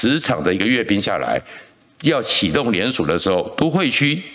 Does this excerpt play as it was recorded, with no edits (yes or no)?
yes